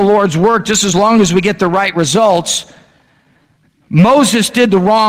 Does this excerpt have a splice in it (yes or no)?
no